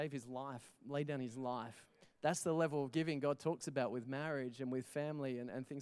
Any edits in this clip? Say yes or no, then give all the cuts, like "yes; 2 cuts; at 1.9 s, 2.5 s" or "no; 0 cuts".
yes; 1 cut; at 2.0 s